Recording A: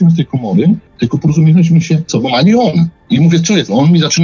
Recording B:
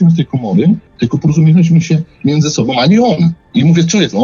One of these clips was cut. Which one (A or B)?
A